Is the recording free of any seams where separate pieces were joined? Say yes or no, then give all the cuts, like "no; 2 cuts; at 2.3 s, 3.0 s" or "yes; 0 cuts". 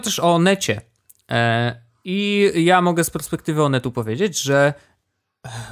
yes; 0 cuts